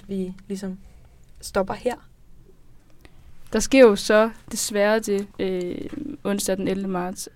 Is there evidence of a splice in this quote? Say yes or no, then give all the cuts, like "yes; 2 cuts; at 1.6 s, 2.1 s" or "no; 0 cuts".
yes; 2 cuts; at 4.4 s, 5.3 s